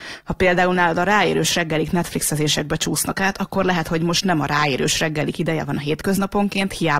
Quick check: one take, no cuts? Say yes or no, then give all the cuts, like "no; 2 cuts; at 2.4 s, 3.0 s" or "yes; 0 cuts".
yes; 0 cuts